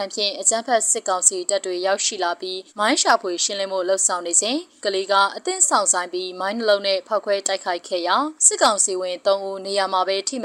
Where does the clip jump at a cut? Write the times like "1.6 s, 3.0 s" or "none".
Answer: 2.7 s, 4.8 s, 8.4 s